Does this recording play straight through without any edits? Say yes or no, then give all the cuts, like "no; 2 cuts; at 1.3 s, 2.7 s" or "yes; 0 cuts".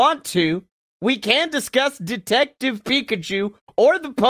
yes; 0 cuts